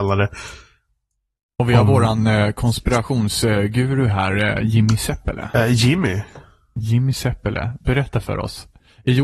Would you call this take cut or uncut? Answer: uncut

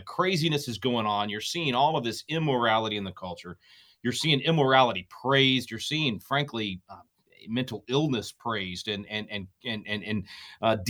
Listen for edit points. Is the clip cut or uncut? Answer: cut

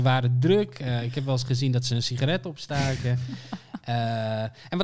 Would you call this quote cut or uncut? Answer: uncut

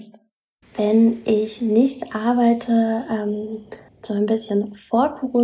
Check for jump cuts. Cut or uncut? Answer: cut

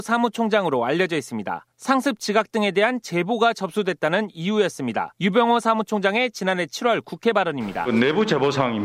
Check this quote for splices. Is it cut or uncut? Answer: cut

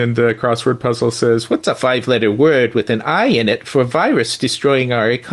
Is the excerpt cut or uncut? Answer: uncut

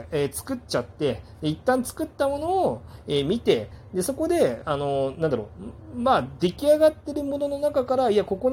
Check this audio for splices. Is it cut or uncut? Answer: uncut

